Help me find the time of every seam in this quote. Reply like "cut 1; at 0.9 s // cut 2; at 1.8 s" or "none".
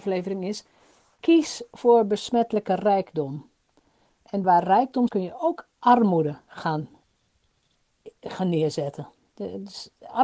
cut 1; at 4.4 s // cut 2; at 5.1 s